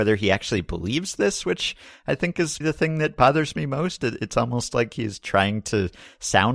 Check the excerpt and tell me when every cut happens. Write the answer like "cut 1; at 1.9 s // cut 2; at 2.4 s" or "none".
cut 1; at 2.6 s